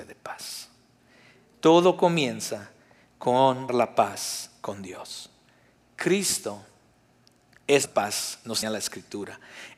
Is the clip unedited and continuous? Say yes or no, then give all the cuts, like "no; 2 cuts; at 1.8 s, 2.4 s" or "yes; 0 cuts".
no; 3 cuts; at 3.7 s, 7.9 s, 8.6 s